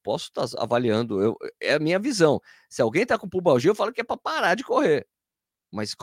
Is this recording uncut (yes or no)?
yes